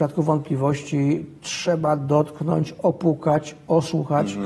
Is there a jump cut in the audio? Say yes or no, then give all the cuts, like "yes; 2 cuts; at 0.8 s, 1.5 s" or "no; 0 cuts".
no; 0 cuts